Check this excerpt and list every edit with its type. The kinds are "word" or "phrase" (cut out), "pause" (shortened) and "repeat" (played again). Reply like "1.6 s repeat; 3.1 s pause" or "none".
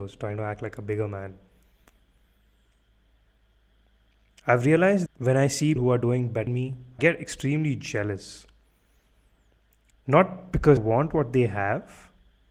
5.1 s word; 5.8 s word; 6.5 s word; 7.0 s word; 10.8 s word